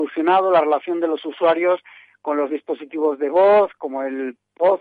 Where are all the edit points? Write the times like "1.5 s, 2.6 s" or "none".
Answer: 2.5 s

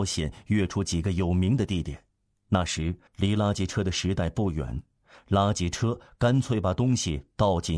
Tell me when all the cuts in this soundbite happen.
2.3 s, 3.1 s

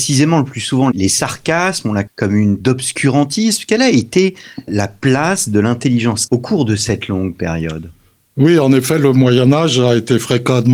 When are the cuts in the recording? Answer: 0.9 s, 2.1 s, 2.6 s, 4.7 s, 6.3 s

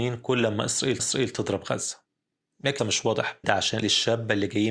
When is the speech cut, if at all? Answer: 1.0 s, 2.8 s, 3.4 s, 3.8 s

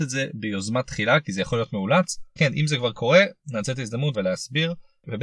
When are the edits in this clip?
2.4 s, 4.1 s

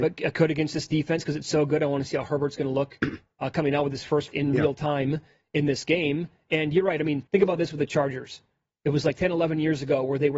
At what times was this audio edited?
4.3 s, 7.3 s

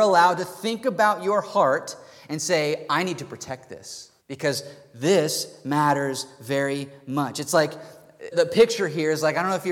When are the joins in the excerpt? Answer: 4.2 s, 8.3 s

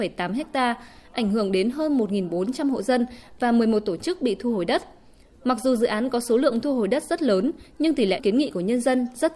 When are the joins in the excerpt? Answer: 8.2 s

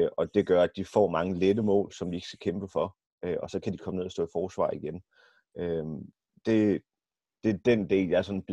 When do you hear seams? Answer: none

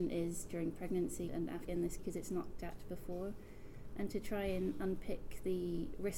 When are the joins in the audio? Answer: 1.3 s, 1.7 s, 2.0 s, 2.6 s

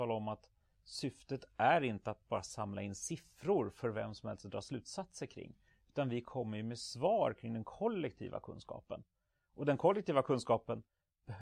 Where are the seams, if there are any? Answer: none

